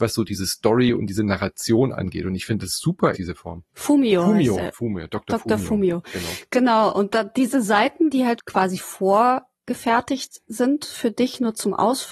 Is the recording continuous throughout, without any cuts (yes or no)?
no